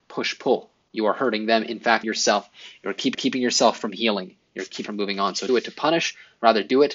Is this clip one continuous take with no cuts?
no; 4 cuts; at 2.0 s, 3.1 s, 4.9 s, 5.5 s

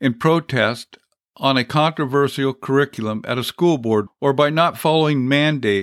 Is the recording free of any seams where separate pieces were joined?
no; 1 cut; at 4.1 s

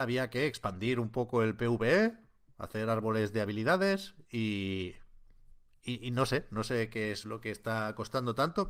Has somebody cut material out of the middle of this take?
no; 0 cuts

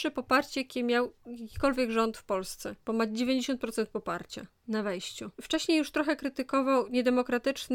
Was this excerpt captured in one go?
no; 2 cuts; at 2.8 s, 5.3 s

